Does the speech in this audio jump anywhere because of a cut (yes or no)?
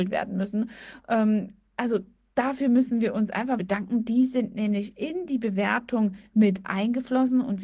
yes